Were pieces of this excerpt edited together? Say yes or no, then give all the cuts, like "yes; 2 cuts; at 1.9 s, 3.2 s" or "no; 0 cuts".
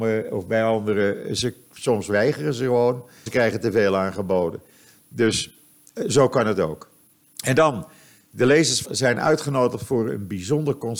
yes; 3 cuts; at 3.3 s, 7.0 s, 8.8 s